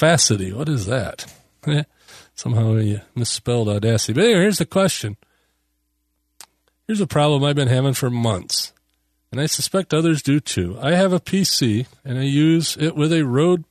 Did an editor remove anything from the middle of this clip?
no; 0 cuts

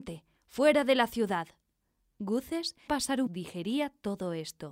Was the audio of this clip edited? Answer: yes; 2 cuts; at 2.9 s, 3.3 s

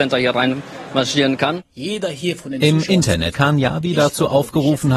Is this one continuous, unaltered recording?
no; 1 cut; at 3.3 s

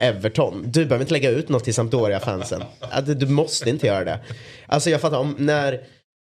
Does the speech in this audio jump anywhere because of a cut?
no; 0 cuts

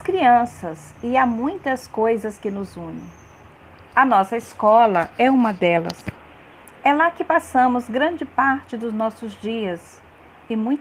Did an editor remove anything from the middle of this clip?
no; 0 cuts

